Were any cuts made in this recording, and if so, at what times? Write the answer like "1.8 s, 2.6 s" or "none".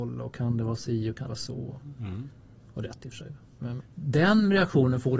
1.3 s, 2.8 s, 3.8 s